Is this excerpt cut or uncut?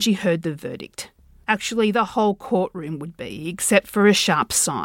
uncut